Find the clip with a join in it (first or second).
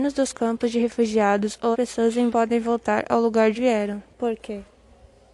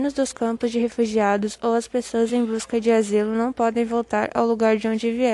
first